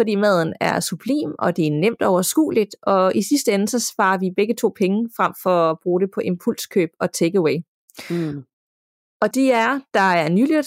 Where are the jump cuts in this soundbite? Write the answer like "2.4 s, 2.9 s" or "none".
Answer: 9.3 s